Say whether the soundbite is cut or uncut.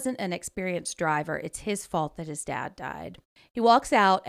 cut